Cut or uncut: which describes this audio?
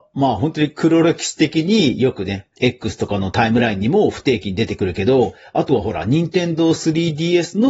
uncut